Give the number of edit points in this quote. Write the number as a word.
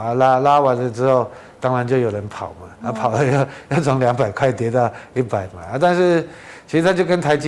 one